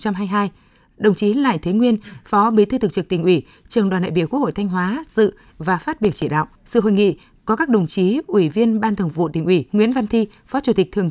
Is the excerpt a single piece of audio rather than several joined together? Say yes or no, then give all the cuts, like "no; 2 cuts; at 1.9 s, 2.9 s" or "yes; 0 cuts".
no; 2 cuts; at 6.5 s, 9.7 s